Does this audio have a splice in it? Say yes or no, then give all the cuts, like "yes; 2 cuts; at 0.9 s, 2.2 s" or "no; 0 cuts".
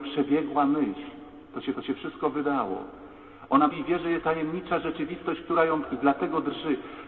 yes; 4 cuts; at 1.7 s, 3.7 s, 4.2 s, 5.8 s